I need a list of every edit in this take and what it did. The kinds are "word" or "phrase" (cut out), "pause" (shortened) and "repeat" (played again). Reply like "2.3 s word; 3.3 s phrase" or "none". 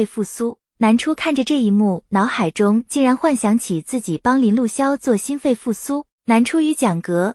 6.1 s pause